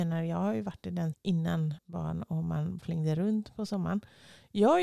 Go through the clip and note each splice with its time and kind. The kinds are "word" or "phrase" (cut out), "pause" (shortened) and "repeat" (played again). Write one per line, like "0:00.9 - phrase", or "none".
0:01.1 - word
0:01.8 - word
0:02.8 - word